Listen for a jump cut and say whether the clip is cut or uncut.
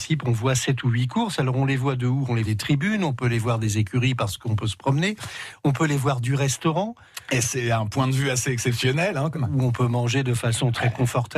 cut